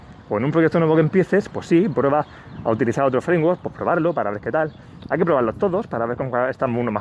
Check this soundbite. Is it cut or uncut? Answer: uncut